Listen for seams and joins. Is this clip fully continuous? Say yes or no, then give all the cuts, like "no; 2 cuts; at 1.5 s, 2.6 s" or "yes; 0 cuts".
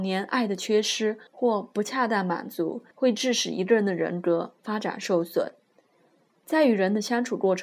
no; 2 cuts; at 1.3 s, 2.9 s